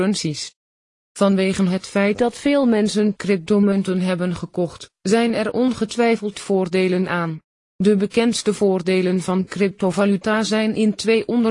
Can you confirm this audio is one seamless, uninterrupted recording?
yes; 0 cuts

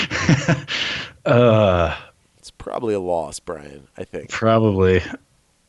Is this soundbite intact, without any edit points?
yes; 0 cuts

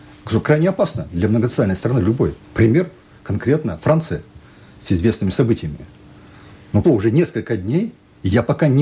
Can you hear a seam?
yes; 2 cuts; at 2.4 s, 6.8 s

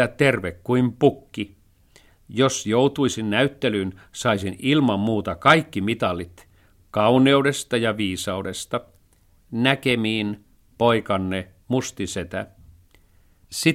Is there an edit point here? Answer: no; 0 cuts

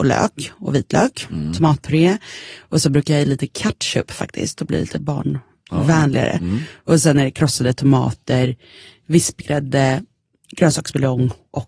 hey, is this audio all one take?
yes; 0 cuts

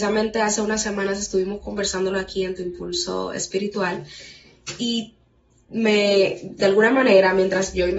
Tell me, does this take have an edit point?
no; 0 cuts

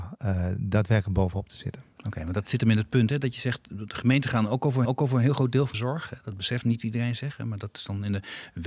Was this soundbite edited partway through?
yes; 2 cuts; at 4.8 s, 5.7 s

